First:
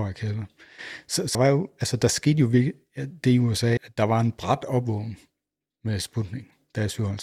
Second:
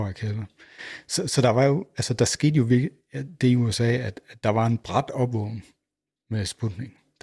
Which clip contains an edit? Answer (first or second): first